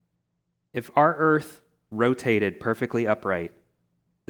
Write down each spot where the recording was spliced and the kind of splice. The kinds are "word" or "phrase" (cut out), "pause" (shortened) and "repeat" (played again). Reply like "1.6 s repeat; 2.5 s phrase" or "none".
none